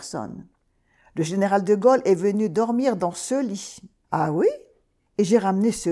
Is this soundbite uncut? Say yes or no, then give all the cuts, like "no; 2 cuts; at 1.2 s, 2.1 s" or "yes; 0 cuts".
yes; 0 cuts